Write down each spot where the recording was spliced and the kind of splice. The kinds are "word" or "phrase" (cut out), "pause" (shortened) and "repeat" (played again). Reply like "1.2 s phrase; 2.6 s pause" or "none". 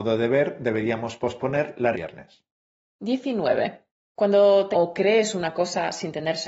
1.9 s phrase; 3.9 s pause; 4.7 s phrase